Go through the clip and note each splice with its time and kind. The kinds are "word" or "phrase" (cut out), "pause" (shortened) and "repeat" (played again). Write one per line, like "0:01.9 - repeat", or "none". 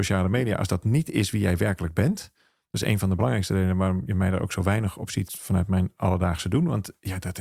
0:05.3 - word